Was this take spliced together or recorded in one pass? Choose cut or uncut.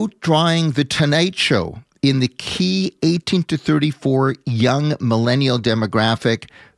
uncut